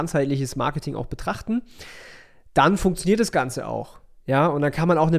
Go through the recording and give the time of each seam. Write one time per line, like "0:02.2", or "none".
none